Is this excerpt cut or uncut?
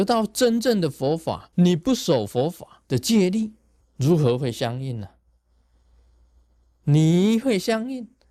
cut